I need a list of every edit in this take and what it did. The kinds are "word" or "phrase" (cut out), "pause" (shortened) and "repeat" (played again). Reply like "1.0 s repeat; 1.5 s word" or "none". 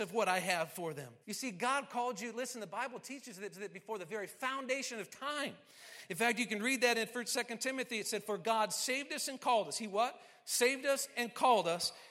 1.2 s pause; 3.5 s repeat